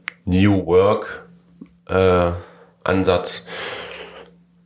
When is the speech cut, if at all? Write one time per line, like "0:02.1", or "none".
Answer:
none